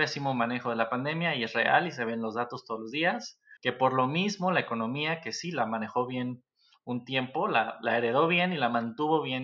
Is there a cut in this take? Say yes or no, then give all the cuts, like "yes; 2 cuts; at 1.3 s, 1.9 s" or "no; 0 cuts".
yes; 1 cut; at 3.6 s